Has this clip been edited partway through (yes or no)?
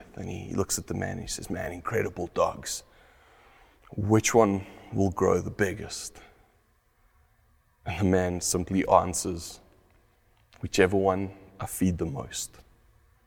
no